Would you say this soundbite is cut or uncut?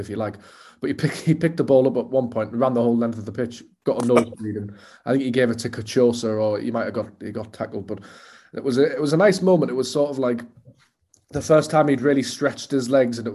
uncut